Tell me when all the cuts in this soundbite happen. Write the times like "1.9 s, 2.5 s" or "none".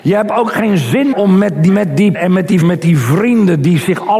1.1 s, 1.7 s, 2.1 s, 2.6 s

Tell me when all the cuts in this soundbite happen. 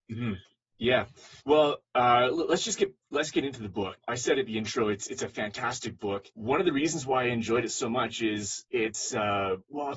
1.4 s, 6.3 s, 8.7 s

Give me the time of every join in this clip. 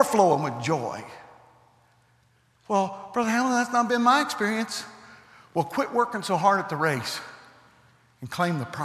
none

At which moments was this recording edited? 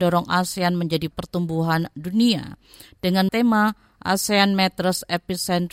1.1 s, 3.3 s

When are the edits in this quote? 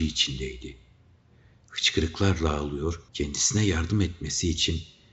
3.1 s

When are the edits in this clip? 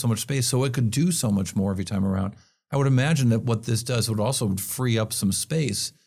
none

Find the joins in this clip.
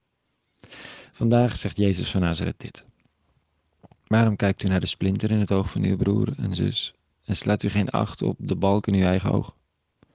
none

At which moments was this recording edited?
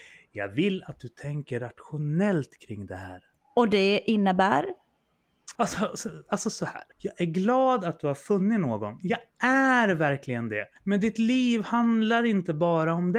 3.3 s, 5.5 s, 6.9 s, 10.8 s

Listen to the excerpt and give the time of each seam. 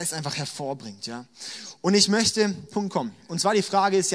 2.7 s

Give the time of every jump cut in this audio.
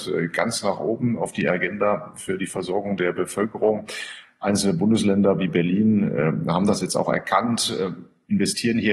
none

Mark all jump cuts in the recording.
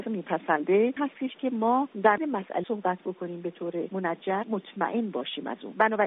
1.0 s, 2.2 s, 2.6 s, 4.4 s

